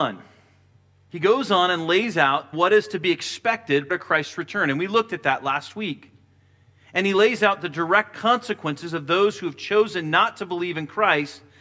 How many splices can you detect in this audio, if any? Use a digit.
2